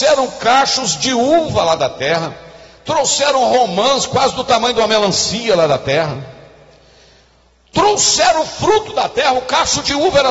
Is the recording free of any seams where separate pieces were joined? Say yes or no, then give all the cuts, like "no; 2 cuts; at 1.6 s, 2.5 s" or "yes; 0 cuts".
yes; 0 cuts